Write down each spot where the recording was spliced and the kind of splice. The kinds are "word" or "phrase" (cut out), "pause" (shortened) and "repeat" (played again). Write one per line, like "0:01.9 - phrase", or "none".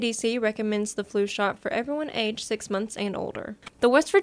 none